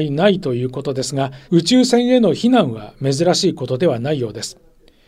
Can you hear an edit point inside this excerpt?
yes; 1 cut; at 1.4 s

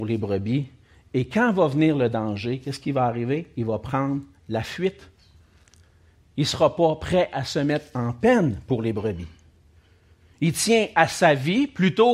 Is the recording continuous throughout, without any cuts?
yes; 0 cuts

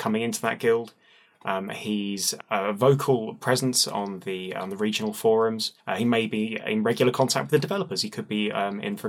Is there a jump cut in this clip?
yes; 1 cut; at 5.8 s

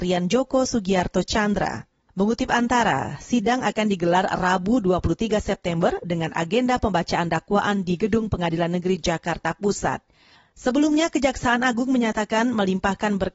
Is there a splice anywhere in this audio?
no; 0 cuts

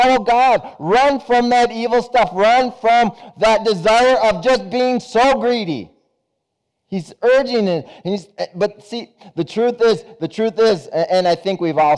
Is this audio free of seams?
yes; 0 cuts

